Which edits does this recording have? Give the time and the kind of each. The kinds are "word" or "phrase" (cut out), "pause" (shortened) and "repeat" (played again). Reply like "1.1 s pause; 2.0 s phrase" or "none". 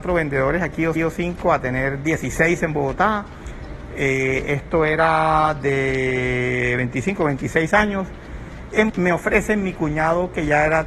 0.9 s repeat; 8.9 s phrase

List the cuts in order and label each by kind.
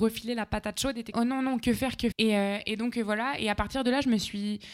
1.1 s word; 2.1 s word

